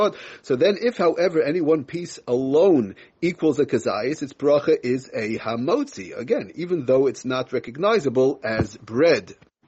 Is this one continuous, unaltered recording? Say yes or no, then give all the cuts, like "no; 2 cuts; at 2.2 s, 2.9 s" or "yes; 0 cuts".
yes; 0 cuts